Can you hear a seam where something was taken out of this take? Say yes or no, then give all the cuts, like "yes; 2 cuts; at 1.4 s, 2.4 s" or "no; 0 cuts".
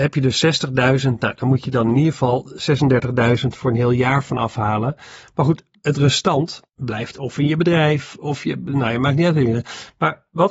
yes; 1 cut; at 6.7 s